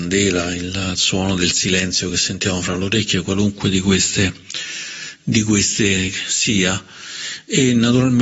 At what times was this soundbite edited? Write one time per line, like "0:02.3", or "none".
none